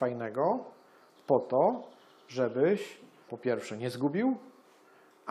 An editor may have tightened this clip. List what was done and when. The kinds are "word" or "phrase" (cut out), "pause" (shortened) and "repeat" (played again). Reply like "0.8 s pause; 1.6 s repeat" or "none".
3.3 s word